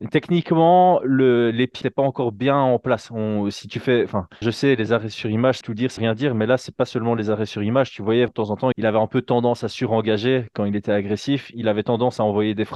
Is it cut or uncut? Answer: cut